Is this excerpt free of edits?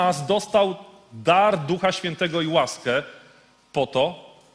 yes; 0 cuts

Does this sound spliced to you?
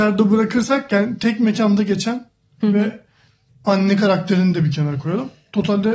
no; 0 cuts

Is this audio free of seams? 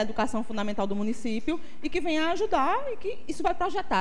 yes; 0 cuts

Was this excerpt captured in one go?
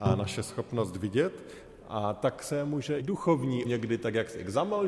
no; 2 cuts; at 3.0 s, 3.6 s

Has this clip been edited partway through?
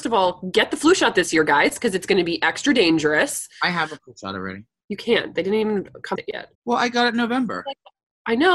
yes; 2 cuts; at 6.2 s, 6.5 s

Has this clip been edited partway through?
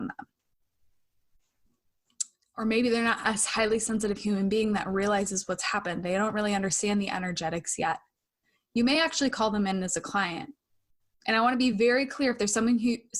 no; 0 cuts

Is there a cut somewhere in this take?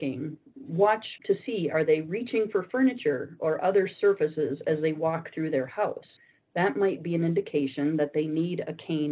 no; 0 cuts

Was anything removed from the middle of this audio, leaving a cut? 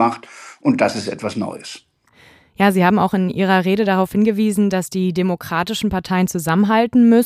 no; 0 cuts

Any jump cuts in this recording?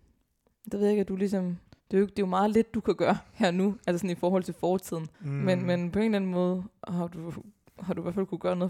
yes; 3 cuts; at 1.7 s, 5.1 s, 7.7 s

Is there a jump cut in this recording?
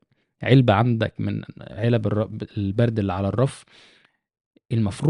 no; 0 cuts

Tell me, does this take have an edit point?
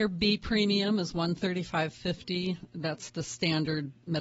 no; 0 cuts

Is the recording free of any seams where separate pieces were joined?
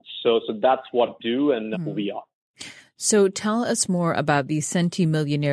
no; 2 cuts; at 1.2 s, 1.7 s

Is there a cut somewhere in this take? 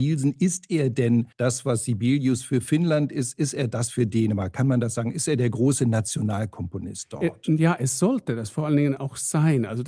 yes; 1 cut; at 1.3 s

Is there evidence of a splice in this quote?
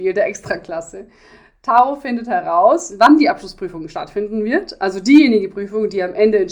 no; 0 cuts

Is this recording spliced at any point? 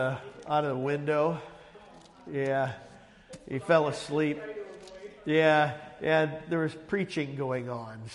no; 0 cuts

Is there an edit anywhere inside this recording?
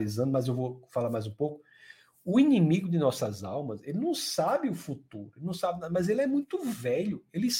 no; 0 cuts

